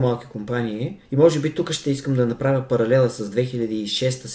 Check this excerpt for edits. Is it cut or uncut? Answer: cut